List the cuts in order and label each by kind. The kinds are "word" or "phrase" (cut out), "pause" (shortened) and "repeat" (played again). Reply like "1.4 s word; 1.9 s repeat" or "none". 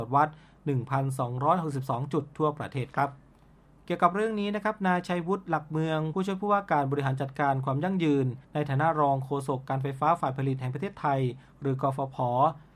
8.4 s pause

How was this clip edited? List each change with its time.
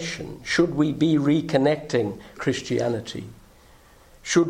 2.4 s word

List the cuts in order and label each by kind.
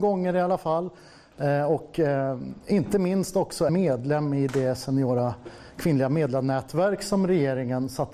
3.7 s word

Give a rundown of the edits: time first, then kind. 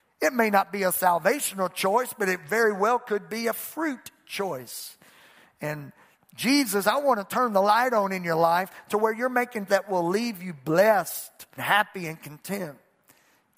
6.8 s word; 9.7 s word; 11.6 s word

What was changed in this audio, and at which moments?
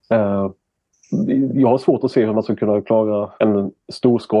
3.4 s pause

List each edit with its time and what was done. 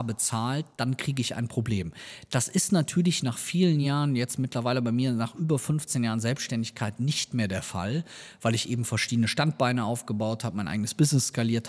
none

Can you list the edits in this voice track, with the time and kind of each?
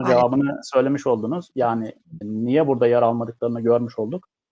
2.2 s word

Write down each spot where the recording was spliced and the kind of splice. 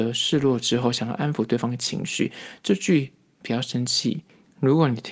none

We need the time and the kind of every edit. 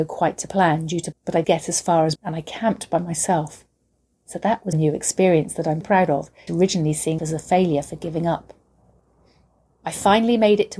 1.1 s word; 1.4 s word; 2.2 s word; 4.7 s word; 5.8 s word; 6.5 s word; 7.2 s word

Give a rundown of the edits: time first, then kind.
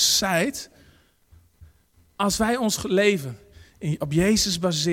none

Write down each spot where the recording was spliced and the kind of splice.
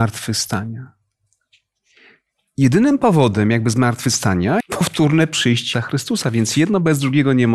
4.6 s word; 5.7 s word

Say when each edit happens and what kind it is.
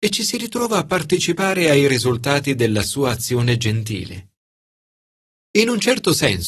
none

